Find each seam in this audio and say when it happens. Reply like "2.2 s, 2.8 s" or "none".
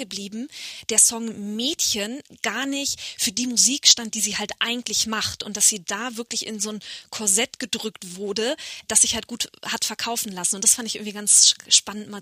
none